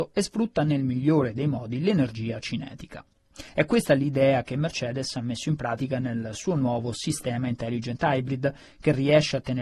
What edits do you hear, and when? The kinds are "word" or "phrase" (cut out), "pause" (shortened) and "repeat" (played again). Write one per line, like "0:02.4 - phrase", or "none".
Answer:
0:03.5 - pause